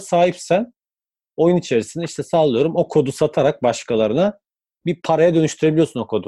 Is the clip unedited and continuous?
yes; 0 cuts

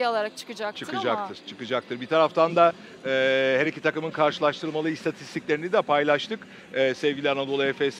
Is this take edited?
no; 0 cuts

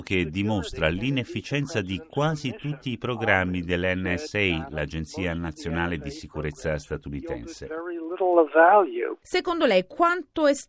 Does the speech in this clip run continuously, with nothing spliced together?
yes; 0 cuts

